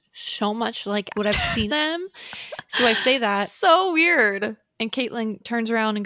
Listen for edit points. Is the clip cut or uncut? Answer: cut